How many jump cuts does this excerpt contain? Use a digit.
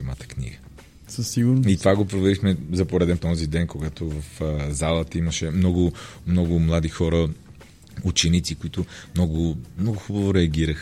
1